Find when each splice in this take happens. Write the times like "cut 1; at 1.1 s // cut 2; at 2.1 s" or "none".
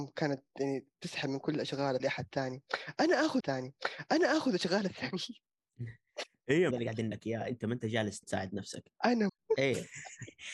cut 1; at 0.9 s // cut 2; at 2.0 s // cut 3; at 3.4 s // cut 4; at 6.7 s // cut 5; at 7.1 s // cut 6; at 8.2 s // cut 7; at 9.3 s